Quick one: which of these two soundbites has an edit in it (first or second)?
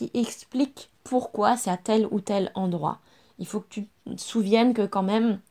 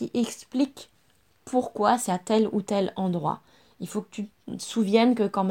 first